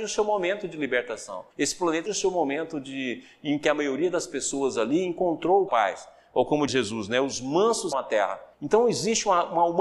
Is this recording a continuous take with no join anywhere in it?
no; 6 cuts; at 1.5 s, 2.1 s, 5.7 s, 6.7 s, 7.9 s, 8.5 s

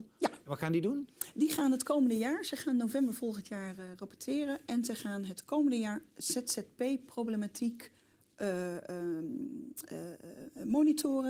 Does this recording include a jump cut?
no; 0 cuts

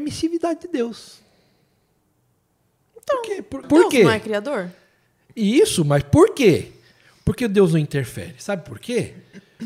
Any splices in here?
yes; 1 cut; at 3.6 s

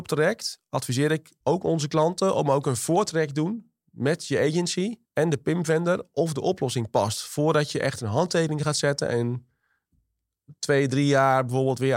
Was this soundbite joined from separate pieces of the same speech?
yes; 2 cuts; at 1.4 s, 5.0 s

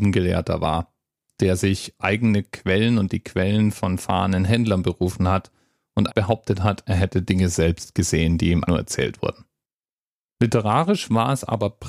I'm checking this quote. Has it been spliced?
yes; 3 cuts; at 2.0 s, 6.1 s, 8.6 s

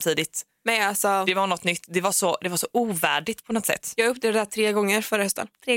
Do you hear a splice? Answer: no; 0 cuts

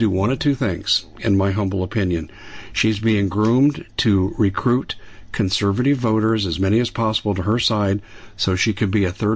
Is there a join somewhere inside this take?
no; 0 cuts

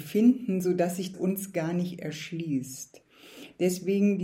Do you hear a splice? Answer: yes; 1 cut; at 1.1 s

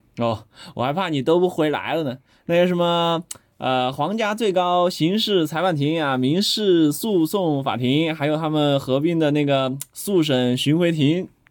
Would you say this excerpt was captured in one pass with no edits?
yes; 0 cuts

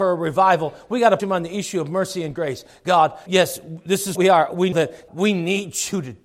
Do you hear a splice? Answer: yes; 5 cuts; at 1.2 s, 3.3 s, 4.2 s, 4.7 s, 5.1 s

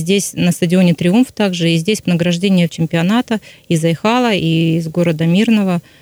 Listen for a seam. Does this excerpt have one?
yes; 2 cuts; at 2.0 s, 2.7 s

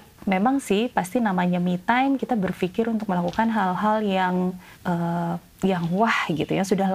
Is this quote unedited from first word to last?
no; 1 cut; at 4.8 s

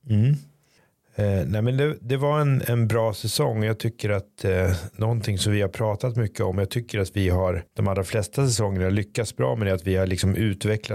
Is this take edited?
no; 0 cuts

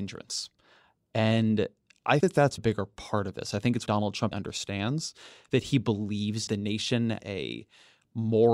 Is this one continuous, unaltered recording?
no; 6 cuts; at 2.2 s, 2.6 s, 3.9 s, 4.3 s, 6.5 s, 7.2 s

